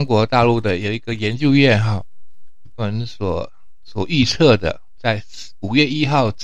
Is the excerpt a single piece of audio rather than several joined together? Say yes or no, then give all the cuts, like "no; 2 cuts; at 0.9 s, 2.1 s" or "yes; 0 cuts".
no; 1 cut; at 2.8 s